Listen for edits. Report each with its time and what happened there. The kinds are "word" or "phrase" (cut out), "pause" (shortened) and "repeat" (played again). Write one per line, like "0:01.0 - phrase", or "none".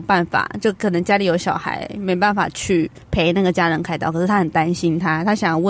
0:03.0 - pause